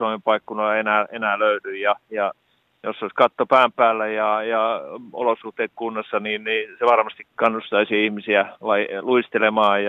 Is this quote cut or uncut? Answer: cut